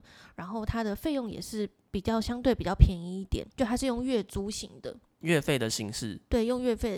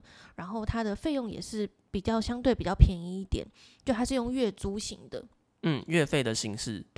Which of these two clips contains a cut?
first; 2 cuts; at 3.5 s, 5.2 s

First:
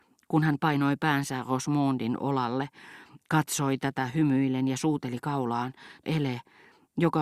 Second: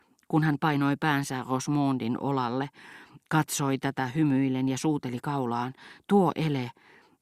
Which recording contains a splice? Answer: first; 1 cut; at 6.0 s

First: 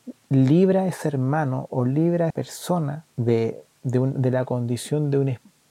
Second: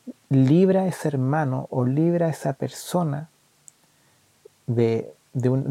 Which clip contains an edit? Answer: first; 2 cuts; at 2.3 s, 3.1 s

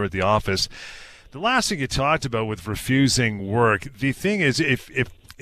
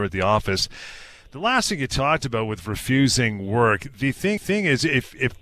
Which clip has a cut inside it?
second; 1 cut; at 4.4 s

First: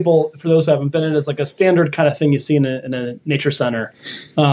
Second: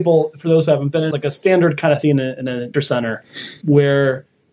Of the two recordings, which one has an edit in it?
second; 4 cuts; at 1.1 s, 2.0 s, 2.7 s, 3.6 s

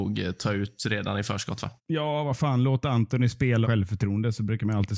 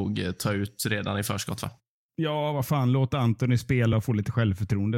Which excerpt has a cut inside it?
first; 2 cuts; at 1.8 s, 3.6 s

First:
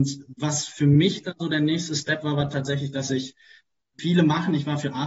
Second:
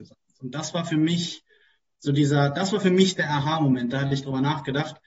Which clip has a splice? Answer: first; 1 cut; at 4.0 s

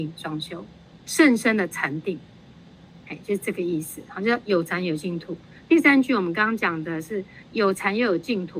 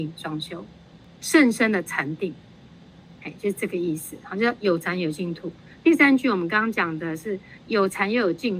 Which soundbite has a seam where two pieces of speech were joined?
first; 1 cut; at 1.0 s

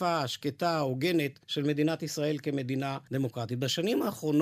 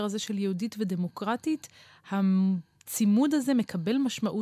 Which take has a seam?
first; 1 cut; at 1.4 s

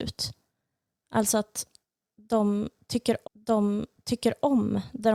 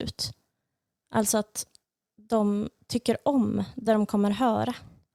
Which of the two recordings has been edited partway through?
first; 1 cut; at 3.2 s

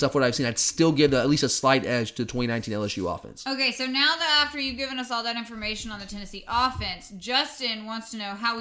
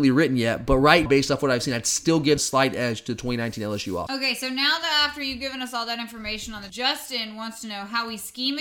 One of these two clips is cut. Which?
second; 4 cuts; at 1.1 s, 2.4 s, 4.1 s, 6.7 s

